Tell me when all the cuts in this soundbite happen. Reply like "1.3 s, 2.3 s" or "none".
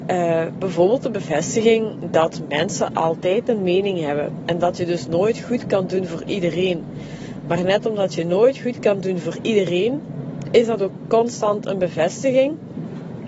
none